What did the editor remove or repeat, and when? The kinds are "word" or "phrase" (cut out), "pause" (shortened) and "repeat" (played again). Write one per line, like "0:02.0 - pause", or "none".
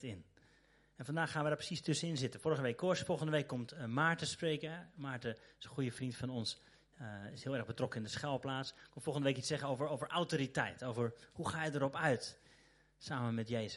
none